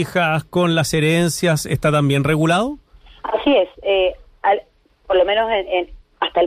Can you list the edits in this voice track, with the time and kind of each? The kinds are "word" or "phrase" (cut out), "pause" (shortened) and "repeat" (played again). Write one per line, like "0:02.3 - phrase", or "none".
none